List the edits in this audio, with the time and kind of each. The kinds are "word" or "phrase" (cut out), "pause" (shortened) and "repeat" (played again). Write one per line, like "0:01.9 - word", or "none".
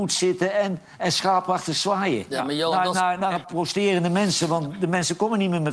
0:03.4 - word